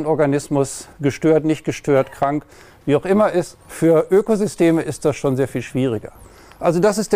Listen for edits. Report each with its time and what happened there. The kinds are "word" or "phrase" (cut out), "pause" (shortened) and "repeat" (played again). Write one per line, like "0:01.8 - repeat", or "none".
0:00.9 - pause
0:03.6 - pause